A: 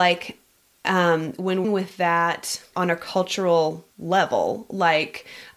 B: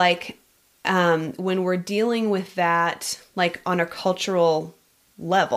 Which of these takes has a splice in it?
A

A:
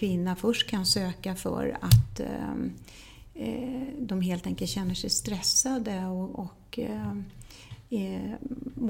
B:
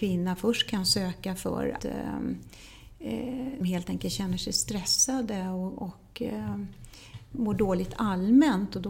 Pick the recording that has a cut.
B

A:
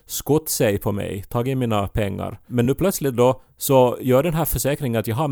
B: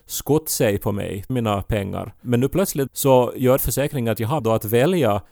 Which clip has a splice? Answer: B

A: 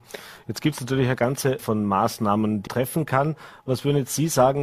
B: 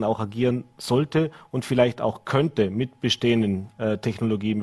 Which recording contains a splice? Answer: A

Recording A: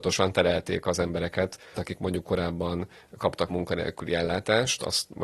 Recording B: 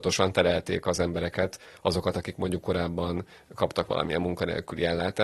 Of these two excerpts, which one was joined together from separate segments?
A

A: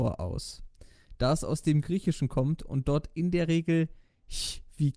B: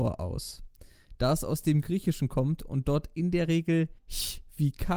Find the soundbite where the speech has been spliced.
B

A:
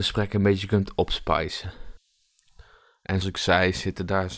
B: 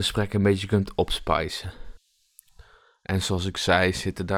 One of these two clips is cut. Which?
A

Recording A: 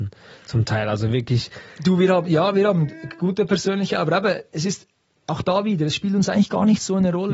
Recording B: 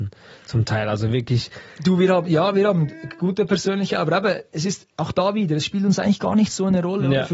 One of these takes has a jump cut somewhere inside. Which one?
B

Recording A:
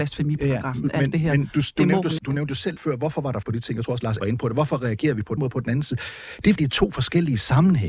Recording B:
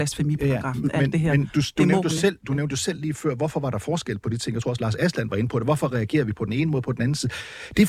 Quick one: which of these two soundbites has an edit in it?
A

